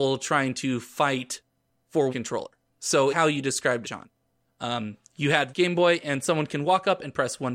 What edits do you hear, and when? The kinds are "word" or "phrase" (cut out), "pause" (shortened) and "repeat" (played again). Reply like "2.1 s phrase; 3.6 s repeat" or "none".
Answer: 2.1 s word; 3.1 s word; 3.8 s word; 5.5 s word